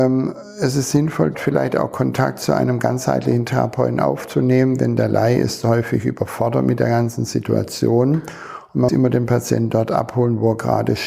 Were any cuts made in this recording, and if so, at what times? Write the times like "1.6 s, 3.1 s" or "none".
1.3 s, 8.9 s